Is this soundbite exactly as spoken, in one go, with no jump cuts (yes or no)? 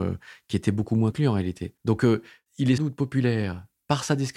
no